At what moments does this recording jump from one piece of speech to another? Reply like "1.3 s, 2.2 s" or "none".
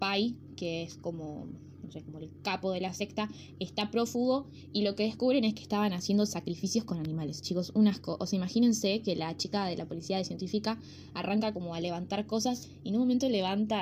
none